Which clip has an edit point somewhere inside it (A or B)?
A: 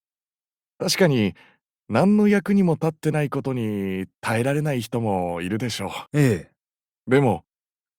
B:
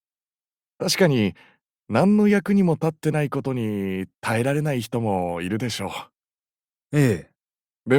A